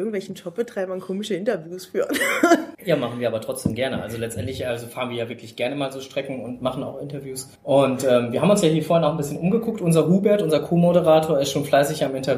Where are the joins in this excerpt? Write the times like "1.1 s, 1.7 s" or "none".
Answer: 2.7 s, 7.6 s